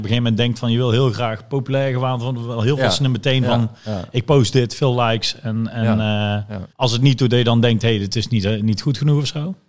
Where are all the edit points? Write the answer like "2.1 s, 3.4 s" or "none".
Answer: 6.7 s